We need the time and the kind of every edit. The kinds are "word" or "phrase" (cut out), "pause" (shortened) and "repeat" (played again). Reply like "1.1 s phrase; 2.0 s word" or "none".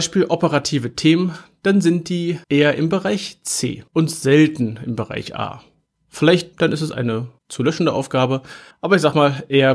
2.4 s pause; 3.9 s pause; 6.5 s word; 7.4 s pause; 8.7 s pause